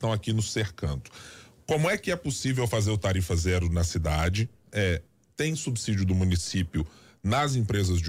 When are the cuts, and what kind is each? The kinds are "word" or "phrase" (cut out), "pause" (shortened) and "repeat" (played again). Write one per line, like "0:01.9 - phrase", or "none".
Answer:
none